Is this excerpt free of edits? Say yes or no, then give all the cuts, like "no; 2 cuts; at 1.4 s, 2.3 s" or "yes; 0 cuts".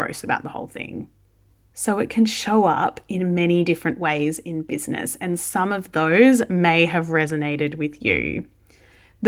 yes; 0 cuts